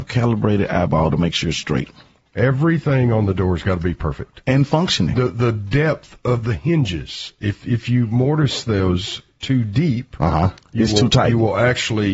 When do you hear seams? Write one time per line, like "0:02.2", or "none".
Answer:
none